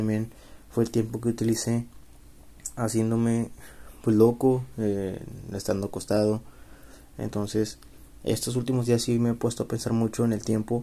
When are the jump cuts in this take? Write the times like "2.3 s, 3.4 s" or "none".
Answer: none